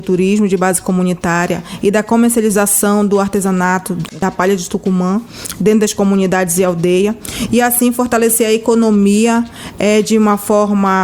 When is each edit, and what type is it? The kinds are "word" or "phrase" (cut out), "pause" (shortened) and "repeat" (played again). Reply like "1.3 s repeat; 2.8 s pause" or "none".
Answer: none